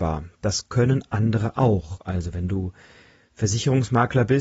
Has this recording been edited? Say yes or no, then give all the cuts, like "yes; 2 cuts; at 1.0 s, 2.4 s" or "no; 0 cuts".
no; 0 cuts